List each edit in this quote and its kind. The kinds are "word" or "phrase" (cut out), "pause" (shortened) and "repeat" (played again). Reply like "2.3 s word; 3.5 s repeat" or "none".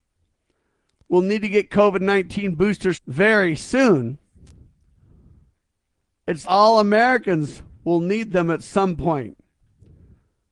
2.9 s word; 6.4 s word